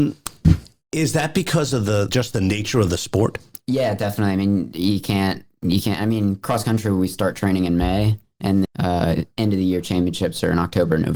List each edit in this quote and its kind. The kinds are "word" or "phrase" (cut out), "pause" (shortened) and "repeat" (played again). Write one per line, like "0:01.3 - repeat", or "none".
0:02.1 - word
0:08.6 - word